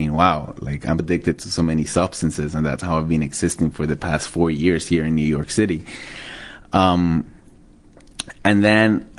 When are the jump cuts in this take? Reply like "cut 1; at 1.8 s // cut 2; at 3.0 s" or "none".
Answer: cut 1; at 1.0 s

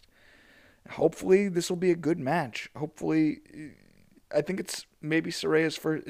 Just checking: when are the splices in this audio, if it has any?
none

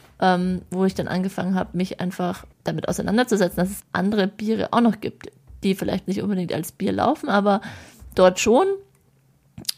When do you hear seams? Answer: cut 1; at 2.5 s // cut 2; at 3.8 s // cut 3; at 6.1 s

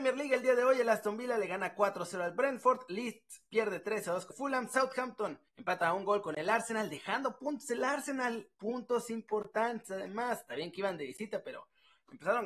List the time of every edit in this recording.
cut 1; at 4.3 s // cut 2; at 5.5 s // cut 3; at 8.5 s

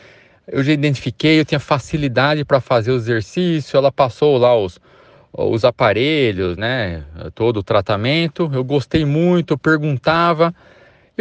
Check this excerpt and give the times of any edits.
none

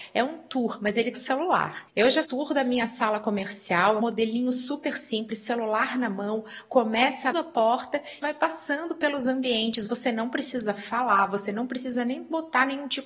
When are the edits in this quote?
cut 1; at 1.1 s // cut 2; at 2.2 s // cut 3; at 4.0 s // cut 4; at 7.3 s // cut 5; at 8.2 s

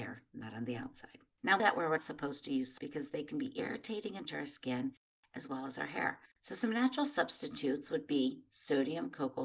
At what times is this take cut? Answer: cut 1; at 1.6 s // cut 2; at 2.0 s // cut 3; at 2.8 s // cut 4; at 4.3 s

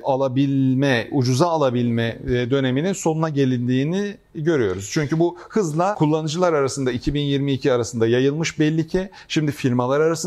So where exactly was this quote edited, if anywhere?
none

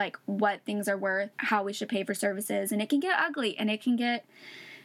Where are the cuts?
cut 1; at 1.3 s

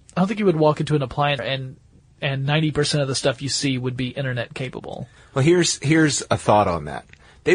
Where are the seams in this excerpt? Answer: cut 1; at 1.4 s // cut 2; at 5.2 s

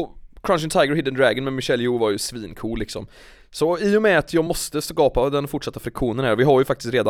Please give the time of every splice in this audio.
none

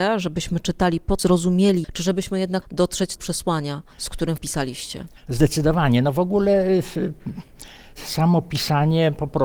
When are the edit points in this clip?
cut 1; at 1.2 s // cut 2; at 1.8 s // cut 3; at 2.6 s // cut 4; at 3.2 s // cut 5; at 3.9 s // cut 6; at 4.4 s // cut 7; at 5.2 s

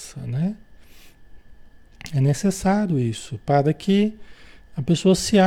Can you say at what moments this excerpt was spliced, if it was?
none

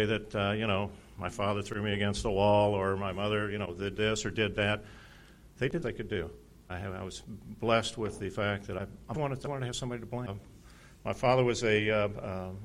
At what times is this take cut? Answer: cut 1; at 5.8 s // cut 2; at 9.1 s // cut 3; at 9.4 s

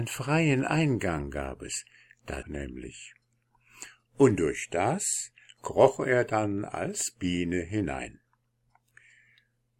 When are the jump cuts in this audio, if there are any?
cut 1; at 2.4 s

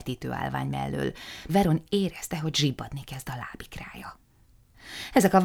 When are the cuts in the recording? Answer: cut 1; at 1.5 s

